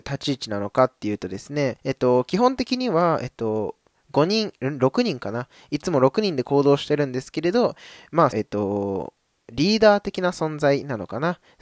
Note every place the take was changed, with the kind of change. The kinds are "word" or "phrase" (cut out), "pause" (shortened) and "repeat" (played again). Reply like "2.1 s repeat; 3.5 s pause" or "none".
1.8 s pause; 8.3 s phrase